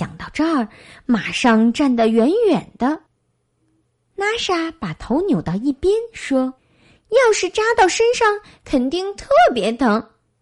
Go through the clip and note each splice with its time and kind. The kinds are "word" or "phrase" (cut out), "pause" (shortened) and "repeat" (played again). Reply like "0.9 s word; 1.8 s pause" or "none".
6.6 s pause